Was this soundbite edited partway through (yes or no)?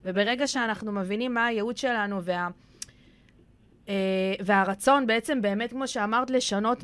no